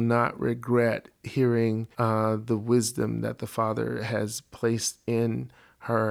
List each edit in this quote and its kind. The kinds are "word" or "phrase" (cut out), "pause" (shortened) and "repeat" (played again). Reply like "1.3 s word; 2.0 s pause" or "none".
1.9 s pause